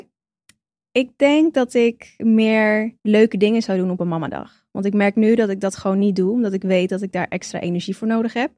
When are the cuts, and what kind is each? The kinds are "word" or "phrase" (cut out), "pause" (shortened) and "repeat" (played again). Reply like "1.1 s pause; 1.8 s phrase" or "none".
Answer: 3.0 s pause